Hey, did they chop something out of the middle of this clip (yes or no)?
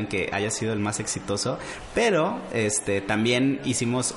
no